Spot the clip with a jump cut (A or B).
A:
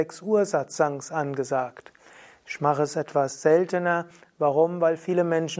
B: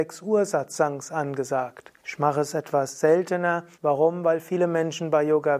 B